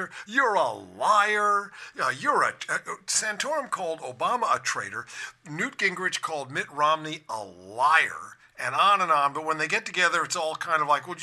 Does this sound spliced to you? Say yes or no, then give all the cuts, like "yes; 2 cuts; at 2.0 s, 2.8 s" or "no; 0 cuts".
no; 0 cuts